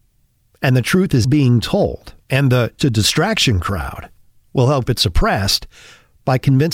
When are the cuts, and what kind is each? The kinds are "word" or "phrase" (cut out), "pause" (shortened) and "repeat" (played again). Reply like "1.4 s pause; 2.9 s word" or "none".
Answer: 1.2 s word; 2.2 s pause; 2.8 s word; 4.9 s word